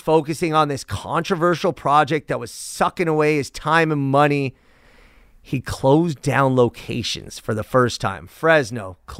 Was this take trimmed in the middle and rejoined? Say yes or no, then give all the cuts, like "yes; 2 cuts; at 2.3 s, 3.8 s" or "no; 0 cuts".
no; 0 cuts